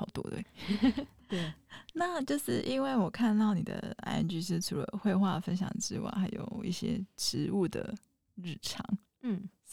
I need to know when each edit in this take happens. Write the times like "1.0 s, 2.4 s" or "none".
none